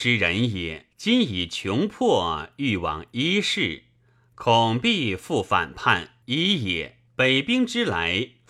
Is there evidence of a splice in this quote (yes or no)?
yes